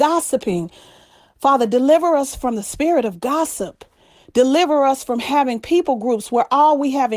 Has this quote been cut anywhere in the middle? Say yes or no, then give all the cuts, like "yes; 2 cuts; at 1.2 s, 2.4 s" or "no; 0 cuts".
no; 0 cuts